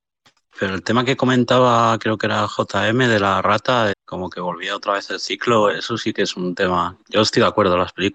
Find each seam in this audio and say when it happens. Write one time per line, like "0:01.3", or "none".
0:03.9